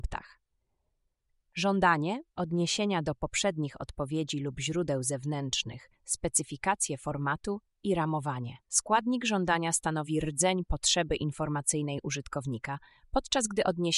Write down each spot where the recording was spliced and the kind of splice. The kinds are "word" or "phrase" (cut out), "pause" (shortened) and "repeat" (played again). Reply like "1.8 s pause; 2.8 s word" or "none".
2.3 s pause; 5.9 s pause; 8.6 s pause